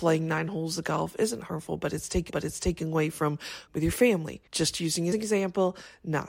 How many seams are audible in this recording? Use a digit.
4